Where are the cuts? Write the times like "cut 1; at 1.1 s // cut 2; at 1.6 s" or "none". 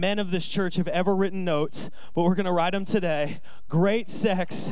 none

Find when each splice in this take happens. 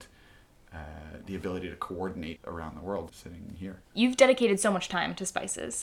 cut 1; at 2.4 s // cut 2; at 3.1 s

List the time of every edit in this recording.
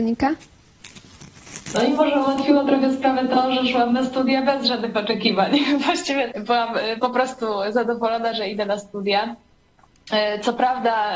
cut 1; at 6.3 s

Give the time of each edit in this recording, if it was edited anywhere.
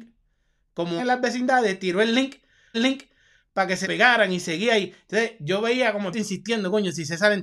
cut 1; at 1.0 s // cut 2; at 2.7 s // cut 3; at 3.8 s // cut 4; at 6.1 s

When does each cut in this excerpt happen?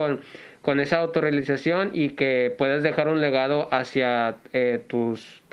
none

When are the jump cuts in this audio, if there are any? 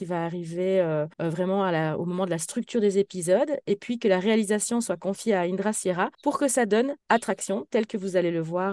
cut 1; at 1.1 s // cut 2; at 6.1 s // cut 3; at 7.0 s

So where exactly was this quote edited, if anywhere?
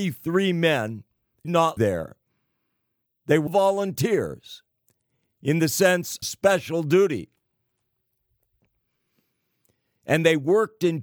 cut 1; at 1.4 s // cut 2; at 1.8 s // cut 3; at 3.5 s // cut 4; at 6.2 s

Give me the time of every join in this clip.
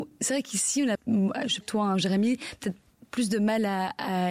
cut 1; at 0.9 s // cut 2; at 1.6 s

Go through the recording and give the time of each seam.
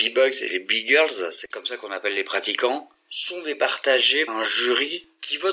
cut 1; at 4.3 s

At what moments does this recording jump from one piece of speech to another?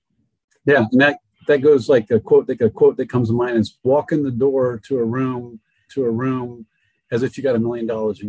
cut 1; at 2.6 s // cut 2; at 5.9 s

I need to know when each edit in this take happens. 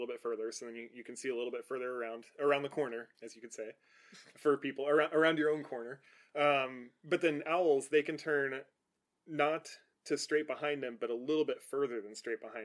cut 1; at 3.1 s

